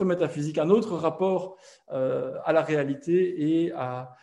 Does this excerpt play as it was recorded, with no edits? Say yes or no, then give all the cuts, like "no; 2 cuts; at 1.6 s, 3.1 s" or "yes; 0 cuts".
yes; 0 cuts